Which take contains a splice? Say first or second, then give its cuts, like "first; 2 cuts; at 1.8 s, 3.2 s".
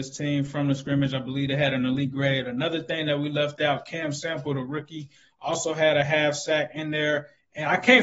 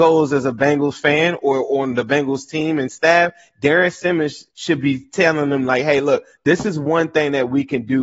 second; 1 cut; at 4.5 s